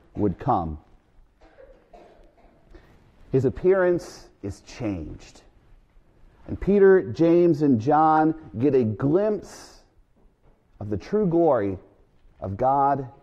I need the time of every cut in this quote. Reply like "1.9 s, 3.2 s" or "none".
none

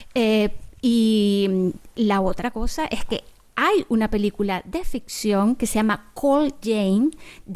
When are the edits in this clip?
none

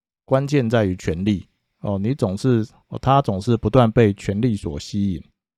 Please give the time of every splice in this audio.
none

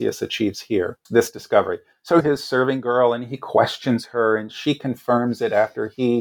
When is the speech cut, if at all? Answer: 1.1 s, 2.2 s

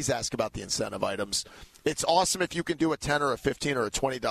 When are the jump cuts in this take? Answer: none

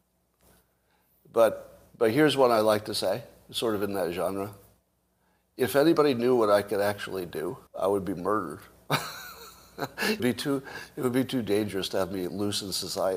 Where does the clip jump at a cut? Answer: 7.7 s, 10.2 s

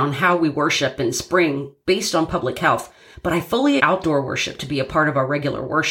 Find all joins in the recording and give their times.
3.8 s

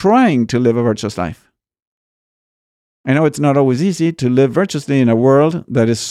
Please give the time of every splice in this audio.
none

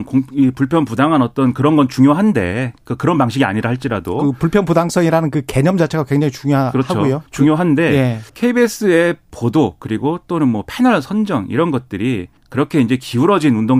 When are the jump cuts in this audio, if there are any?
7.3 s, 8.3 s, 12.4 s

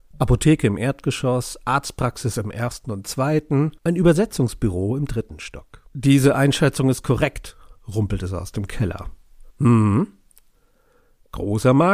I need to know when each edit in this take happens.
3.8 s, 5.9 s, 7.8 s, 9.5 s

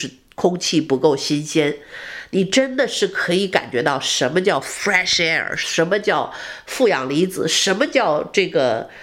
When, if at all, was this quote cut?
none

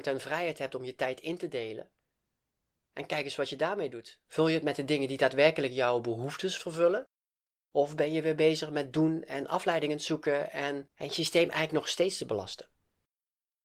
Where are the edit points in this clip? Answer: 4.2 s

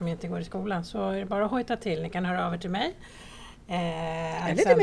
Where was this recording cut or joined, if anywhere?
none

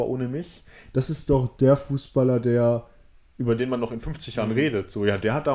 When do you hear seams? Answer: none

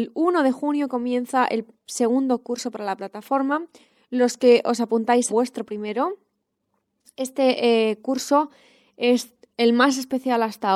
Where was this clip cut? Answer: 5.3 s

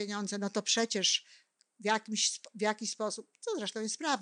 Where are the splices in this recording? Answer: none

